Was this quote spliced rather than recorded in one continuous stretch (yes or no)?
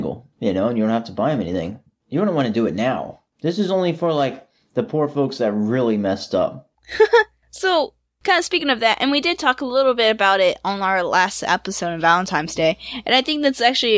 no